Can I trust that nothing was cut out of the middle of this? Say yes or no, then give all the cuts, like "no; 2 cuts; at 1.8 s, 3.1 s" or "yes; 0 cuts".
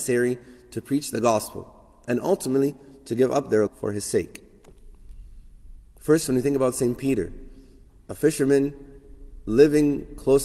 no; 1 cut; at 3.7 s